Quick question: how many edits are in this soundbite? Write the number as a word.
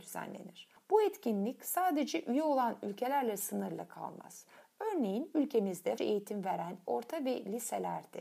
two